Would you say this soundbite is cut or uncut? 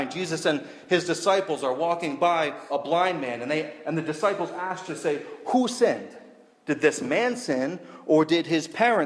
cut